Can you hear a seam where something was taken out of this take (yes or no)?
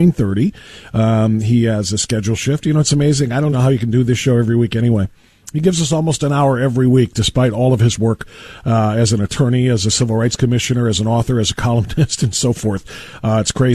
yes